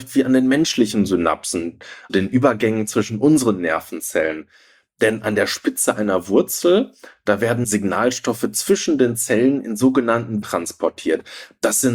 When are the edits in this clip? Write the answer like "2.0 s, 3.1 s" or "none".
2.1 s, 7.6 s, 10.4 s